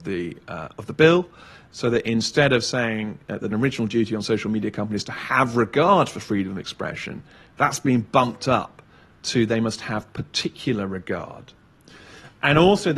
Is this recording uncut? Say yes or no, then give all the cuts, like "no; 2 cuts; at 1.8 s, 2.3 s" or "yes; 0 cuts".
no; 1 cut; at 3.5 s